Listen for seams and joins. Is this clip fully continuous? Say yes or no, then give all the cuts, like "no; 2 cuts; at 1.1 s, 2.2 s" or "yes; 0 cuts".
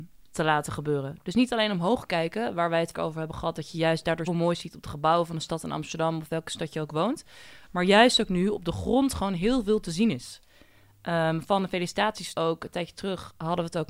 no; 3 cuts; at 2.9 s, 4.3 s, 12.3 s